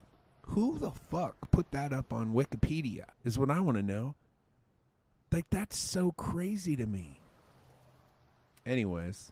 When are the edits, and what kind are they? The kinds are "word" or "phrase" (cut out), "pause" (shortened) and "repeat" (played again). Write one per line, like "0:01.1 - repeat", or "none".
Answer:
0:03.1 - pause